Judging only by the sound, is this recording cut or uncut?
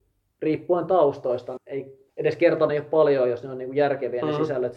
cut